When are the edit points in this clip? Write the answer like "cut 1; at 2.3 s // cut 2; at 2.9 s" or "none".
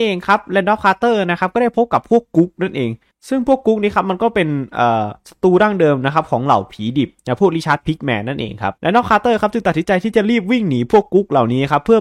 cut 1; at 7.2 s // cut 2; at 8.8 s